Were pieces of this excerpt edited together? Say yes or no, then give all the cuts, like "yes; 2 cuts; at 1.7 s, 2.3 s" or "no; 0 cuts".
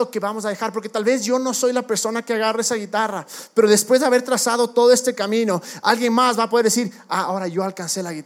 no; 0 cuts